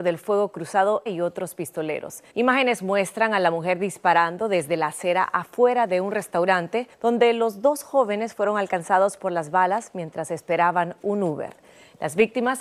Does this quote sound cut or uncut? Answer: cut